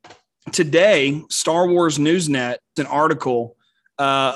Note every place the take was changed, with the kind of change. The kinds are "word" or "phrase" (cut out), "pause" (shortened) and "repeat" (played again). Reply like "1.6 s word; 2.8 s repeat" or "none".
2.8 s word